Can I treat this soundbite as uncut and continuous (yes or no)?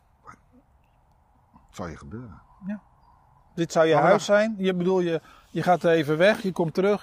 yes